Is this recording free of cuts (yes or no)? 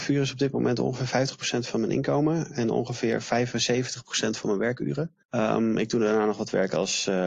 no